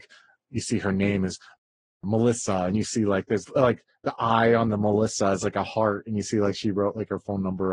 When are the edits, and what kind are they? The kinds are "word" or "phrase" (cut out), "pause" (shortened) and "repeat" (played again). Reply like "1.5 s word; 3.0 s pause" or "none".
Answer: 3.4 s word